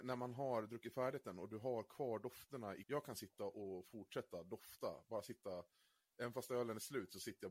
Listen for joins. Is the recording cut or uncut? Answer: cut